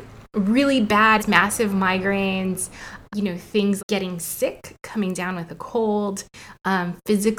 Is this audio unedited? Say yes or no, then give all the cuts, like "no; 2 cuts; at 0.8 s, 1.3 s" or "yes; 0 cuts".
no; 3 cuts; at 1.2 s, 3.1 s, 3.8 s